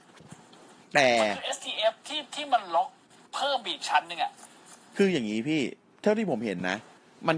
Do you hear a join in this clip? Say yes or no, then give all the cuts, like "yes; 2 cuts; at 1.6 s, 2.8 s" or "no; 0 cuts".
no; 0 cuts